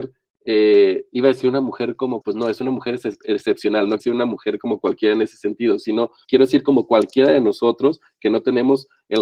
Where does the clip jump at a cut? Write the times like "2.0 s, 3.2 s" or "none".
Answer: 2.2 s, 4.0 s